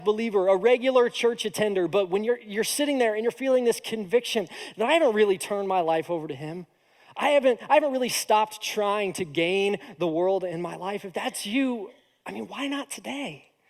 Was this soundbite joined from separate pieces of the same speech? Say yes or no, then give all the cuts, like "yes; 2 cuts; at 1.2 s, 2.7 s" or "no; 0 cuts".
no; 0 cuts